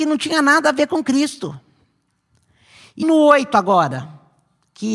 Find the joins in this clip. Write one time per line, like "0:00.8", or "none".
0:03.0